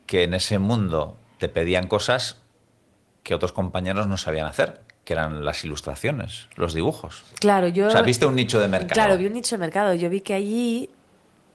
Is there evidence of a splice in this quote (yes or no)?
no